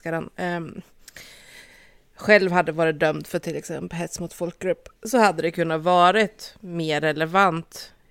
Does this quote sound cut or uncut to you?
cut